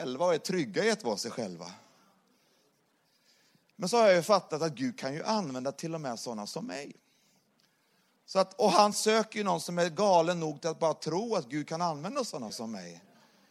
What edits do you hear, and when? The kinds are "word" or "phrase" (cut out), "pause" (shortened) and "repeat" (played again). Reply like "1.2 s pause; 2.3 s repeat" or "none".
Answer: none